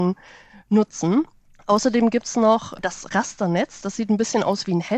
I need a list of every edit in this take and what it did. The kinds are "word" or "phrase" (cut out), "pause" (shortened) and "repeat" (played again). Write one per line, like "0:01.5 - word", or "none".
none